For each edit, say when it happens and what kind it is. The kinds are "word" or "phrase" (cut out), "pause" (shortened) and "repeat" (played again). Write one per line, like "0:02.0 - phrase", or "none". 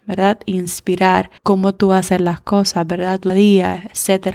0:01.4 - pause
0:03.3 - word

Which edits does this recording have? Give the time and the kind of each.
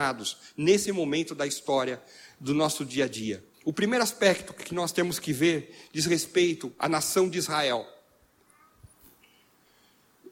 0:03.5 - pause

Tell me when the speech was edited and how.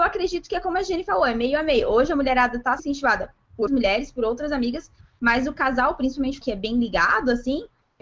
0:02.8 - word
0:03.7 - word
0:06.4 - word

